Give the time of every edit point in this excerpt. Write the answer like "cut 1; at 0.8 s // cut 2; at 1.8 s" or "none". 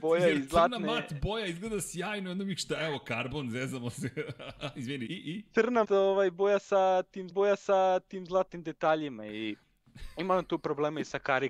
cut 1; at 5.1 s // cut 2; at 5.8 s // cut 3; at 7.3 s